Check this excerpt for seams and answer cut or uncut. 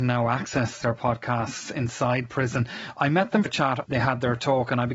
cut